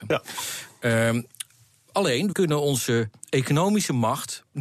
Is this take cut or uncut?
cut